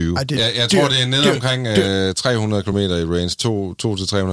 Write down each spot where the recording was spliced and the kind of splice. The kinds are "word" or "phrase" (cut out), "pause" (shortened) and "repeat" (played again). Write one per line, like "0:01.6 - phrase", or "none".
none